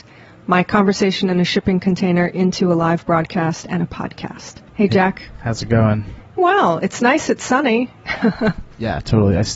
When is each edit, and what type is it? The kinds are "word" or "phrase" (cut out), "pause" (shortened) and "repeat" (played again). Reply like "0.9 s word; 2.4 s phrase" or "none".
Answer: 4.7 s pause; 6.4 s word